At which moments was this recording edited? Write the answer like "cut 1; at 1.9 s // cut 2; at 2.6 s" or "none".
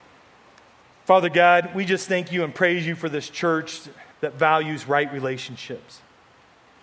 cut 1; at 4.1 s